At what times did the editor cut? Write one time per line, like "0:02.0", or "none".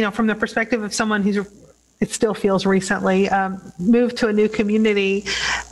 none